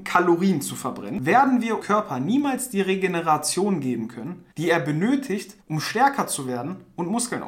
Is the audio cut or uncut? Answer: cut